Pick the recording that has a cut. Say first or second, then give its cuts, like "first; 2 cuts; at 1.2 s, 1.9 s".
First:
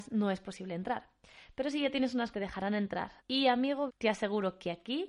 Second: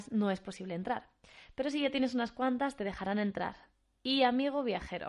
first; 3 cuts; at 2.3 s, 3.2 s, 3.9 s